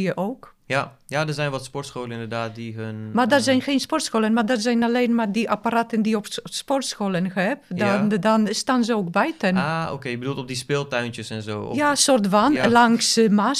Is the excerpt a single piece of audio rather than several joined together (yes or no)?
yes